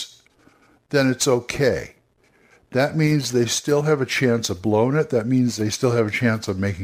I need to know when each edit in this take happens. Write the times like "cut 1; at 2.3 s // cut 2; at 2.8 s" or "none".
none

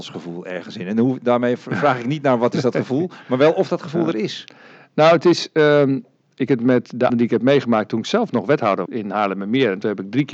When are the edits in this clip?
cut 1; at 6.5 s // cut 2; at 7.1 s // cut 3; at 8.9 s

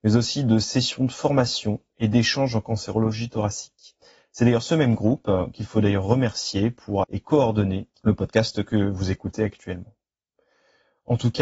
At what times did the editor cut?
cut 1; at 7.0 s // cut 2; at 8.0 s

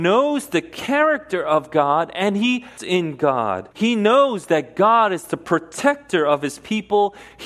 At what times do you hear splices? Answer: cut 1; at 2.8 s // cut 2; at 3.7 s

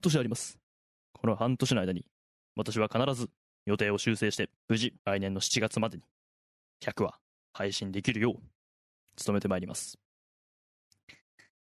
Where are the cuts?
cut 1; at 4.6 s // cut 2; at 5.0 s

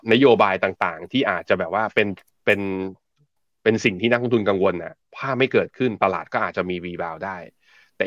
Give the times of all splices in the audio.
none

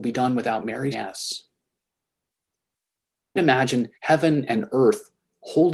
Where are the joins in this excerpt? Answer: cut 1; at 0.9 s // cut 2; at 3.4 s // cut 3; at 3.9 s

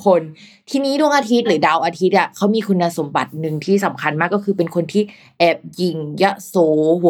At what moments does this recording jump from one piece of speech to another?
none

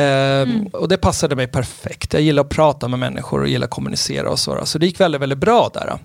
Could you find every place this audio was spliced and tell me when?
none

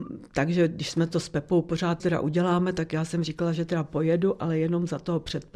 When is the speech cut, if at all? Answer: cut 1; at 2.0 s

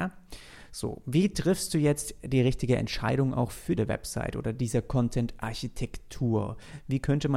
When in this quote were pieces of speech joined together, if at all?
cut 1; at 3.8 s

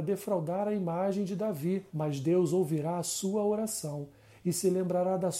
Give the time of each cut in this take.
cut 1; at 1.9 s

